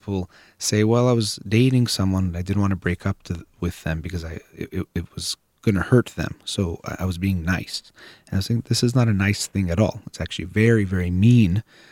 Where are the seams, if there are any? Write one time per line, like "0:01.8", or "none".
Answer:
none